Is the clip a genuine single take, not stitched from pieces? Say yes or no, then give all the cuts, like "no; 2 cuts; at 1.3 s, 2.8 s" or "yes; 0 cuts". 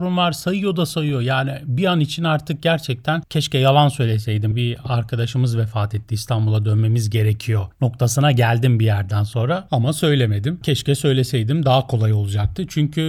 yes; 0 cuts